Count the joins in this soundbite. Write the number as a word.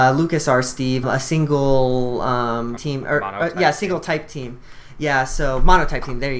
two